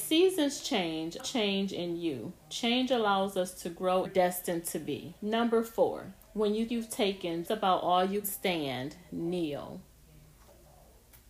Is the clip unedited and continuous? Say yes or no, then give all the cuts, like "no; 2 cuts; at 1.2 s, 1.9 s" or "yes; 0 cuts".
no; 7 cuts; at 1.2 s, 4.0 s, 5.2 s, 6.2 s, 6.7 s, 7.4 s, 8.2 s